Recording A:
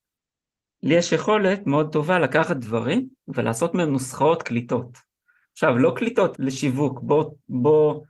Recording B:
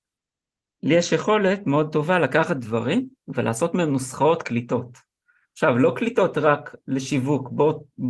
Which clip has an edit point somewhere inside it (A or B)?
A